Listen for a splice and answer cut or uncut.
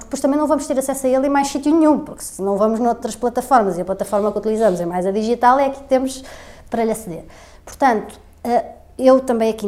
uncut